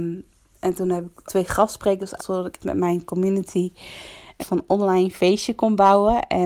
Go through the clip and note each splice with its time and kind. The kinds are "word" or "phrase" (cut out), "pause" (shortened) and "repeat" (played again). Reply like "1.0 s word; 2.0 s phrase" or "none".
1.3 s word; 2.2 s word; 2.6 s word; 4.4 s word